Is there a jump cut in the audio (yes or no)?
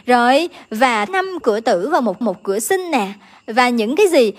yes